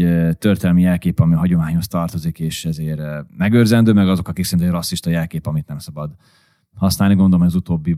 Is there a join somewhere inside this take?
yes; 1 cut; at 3.3 s

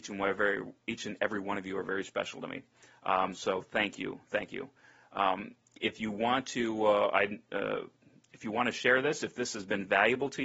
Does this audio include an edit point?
no; 0 cuts

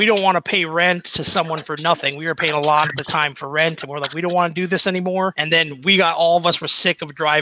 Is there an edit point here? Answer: no; 0 cuts

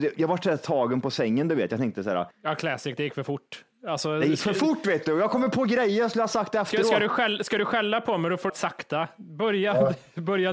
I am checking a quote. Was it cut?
yes; 2 cuts; at 2.3 s, 8.5 s

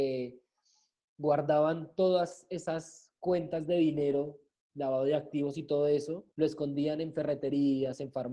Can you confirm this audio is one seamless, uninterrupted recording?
no; 2 cuts; at 4.6 s, 6.3 s

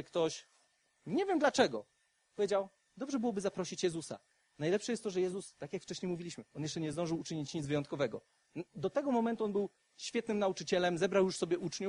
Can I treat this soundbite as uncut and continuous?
yes; 0 cuts

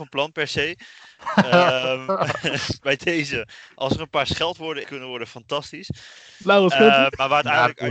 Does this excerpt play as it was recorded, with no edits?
no; 2 cuts; at 2.8 s, 4.8 s

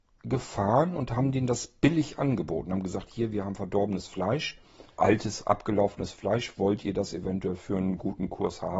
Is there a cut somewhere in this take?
yes; 1 cut; at 5.0 s

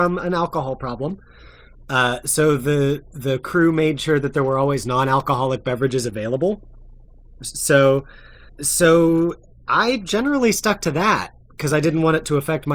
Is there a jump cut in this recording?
yes; 1 cut; at 8.5 s

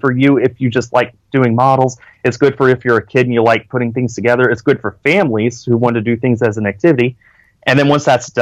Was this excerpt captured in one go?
yes; 0 cuts

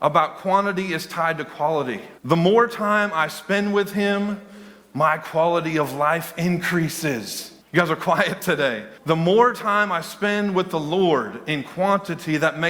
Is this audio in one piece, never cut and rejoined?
no; 3 cuts; at 2.2 s, 7.6 s, 9.0 s

